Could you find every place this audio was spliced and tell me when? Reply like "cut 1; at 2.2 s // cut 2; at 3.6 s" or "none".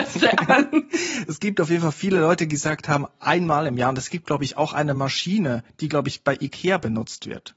none